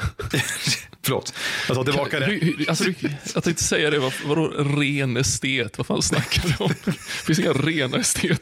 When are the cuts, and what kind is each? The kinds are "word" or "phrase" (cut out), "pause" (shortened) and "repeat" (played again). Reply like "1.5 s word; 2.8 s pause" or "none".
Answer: none